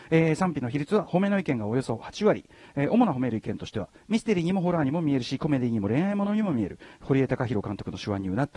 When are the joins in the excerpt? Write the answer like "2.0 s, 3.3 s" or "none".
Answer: none